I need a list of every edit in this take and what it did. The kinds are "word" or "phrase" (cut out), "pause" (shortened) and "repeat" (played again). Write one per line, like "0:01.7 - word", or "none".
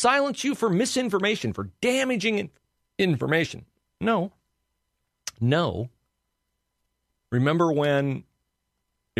none